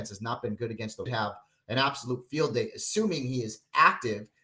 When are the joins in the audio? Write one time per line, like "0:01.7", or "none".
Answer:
0:01.1